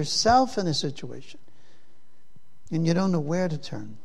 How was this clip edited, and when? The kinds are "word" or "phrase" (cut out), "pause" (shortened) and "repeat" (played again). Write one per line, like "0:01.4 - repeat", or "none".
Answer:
none